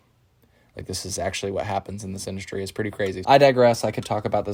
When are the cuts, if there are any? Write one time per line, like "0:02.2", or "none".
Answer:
0:03.2